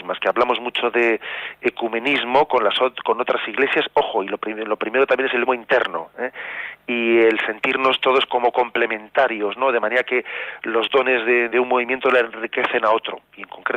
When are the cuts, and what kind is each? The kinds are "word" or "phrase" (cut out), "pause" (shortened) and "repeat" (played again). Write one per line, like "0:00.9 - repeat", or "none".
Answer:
0:05.5 - word
0:11.5 - word